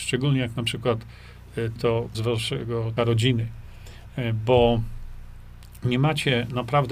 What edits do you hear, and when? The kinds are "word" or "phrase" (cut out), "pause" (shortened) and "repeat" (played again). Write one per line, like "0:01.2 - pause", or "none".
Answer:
0:01.8 - word
0:02.1 - word
0:03.0 - word